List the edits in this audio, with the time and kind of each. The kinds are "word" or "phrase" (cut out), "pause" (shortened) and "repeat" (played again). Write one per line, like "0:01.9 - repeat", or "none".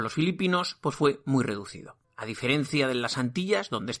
0:02.0 - pause